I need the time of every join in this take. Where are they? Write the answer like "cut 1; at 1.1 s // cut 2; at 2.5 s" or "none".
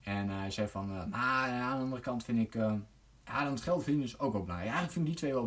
none